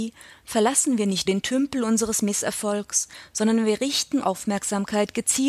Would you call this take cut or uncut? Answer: cut